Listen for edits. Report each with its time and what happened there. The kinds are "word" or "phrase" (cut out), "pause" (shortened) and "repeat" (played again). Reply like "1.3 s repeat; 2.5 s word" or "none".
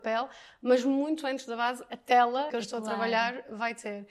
2.5 s word